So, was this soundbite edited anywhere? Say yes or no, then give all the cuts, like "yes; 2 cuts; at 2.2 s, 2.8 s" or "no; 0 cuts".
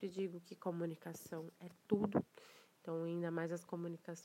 no; 0 cuts